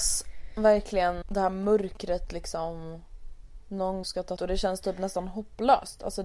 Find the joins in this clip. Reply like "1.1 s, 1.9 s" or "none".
1.2 s, 4.0 s, 4.4 s